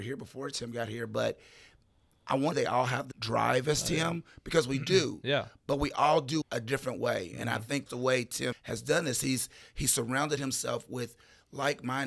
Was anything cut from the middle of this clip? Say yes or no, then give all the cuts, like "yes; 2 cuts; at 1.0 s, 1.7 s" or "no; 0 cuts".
yes; 5 cuts; at 2.5 s, 3.1 s, 6.4 s, 7.9 s, 8.5 s